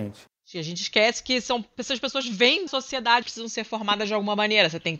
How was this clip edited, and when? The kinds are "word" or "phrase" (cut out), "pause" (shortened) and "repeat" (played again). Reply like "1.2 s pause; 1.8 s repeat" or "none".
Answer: 2.7 s word; 3.2 s word